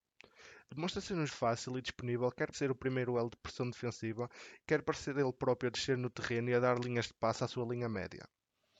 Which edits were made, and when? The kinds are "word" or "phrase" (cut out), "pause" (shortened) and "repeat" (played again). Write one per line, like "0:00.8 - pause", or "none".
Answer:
0:01.3 - phrase
0:02.5 - word